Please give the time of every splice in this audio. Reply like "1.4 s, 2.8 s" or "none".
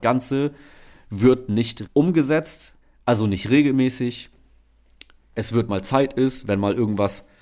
1.9 s, 2.8 s, 5.7 s